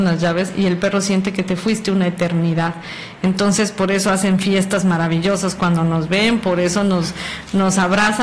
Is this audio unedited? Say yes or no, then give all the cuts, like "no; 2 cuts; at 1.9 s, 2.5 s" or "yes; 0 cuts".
yes; 0 cuts